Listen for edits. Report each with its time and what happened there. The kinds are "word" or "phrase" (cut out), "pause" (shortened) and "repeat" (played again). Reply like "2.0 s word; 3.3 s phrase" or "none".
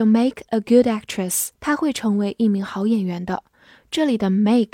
1.5 s pause